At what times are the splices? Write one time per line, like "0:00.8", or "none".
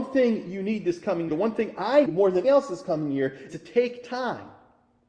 0:01.3
0:02.0
0:02.4
0:03.5